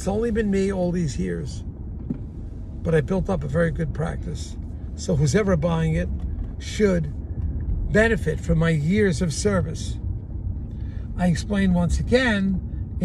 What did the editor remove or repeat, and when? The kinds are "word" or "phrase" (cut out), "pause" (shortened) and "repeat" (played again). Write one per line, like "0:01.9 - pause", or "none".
none